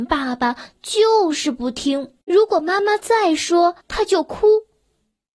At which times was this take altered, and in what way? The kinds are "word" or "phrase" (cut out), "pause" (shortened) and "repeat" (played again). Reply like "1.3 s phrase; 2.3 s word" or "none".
2.2 s pause; 3.8 s pause